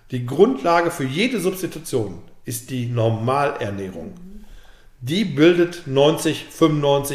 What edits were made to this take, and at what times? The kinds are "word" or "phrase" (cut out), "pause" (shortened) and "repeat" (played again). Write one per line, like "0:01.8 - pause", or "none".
none